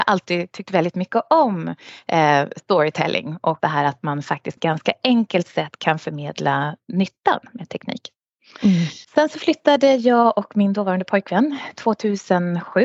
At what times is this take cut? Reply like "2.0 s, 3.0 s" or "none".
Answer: 3.6 s, 4.6 s, 9.0 s